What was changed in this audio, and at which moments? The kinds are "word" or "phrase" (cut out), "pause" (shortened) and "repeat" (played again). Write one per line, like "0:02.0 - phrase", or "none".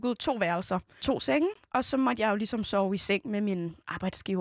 0:01.0 - word